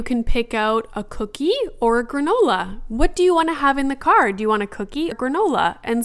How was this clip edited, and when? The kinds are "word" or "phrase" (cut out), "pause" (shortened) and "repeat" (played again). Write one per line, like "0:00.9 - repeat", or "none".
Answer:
0:05.1 - word